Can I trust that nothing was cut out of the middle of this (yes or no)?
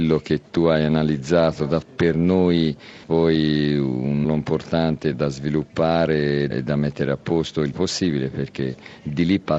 no